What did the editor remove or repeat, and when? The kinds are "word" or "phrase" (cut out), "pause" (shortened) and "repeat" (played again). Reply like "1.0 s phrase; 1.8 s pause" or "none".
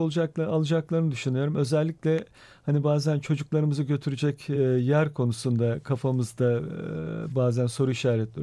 none